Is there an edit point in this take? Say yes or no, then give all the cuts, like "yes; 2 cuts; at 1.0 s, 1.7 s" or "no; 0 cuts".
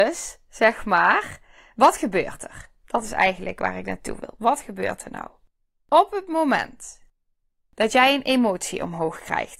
no; 0 cuts